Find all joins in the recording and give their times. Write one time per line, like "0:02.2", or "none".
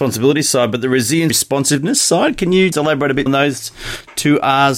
0:01.3
0:02.7
0:03.3